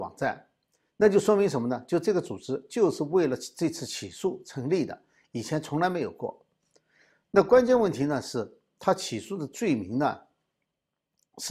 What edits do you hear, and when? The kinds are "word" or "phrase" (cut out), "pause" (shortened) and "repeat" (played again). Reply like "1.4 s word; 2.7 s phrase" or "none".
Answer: none